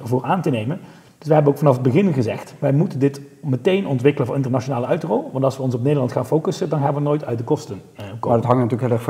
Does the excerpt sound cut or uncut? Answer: uncut